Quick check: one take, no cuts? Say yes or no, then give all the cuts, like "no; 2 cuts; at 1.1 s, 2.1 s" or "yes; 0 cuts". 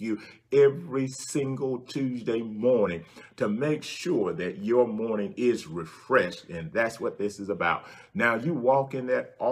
yes; 0 cuts